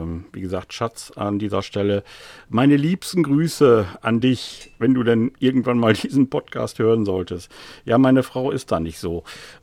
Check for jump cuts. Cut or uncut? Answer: uncut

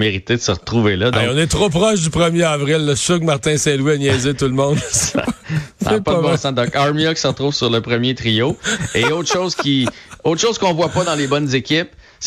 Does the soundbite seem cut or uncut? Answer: uncut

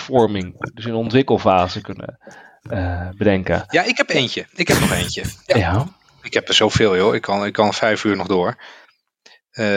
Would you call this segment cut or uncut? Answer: uncut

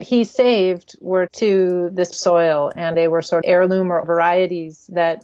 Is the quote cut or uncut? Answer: cut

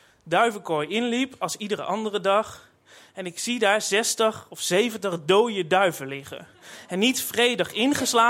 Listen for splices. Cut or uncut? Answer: uncut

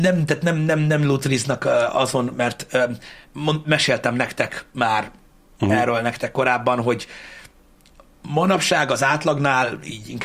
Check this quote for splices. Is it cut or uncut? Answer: uncut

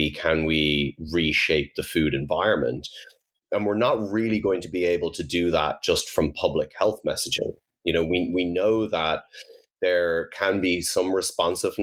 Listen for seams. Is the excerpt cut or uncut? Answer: uncut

